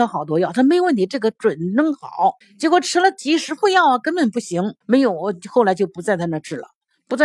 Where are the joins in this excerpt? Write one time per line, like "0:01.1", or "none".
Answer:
0:02.4
0:04.8